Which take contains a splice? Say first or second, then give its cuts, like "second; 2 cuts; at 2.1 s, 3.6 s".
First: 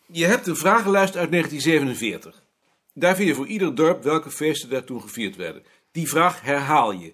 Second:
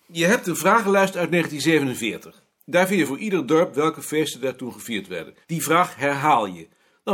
second; 2 cuts; at 2.5 s, 5.4 s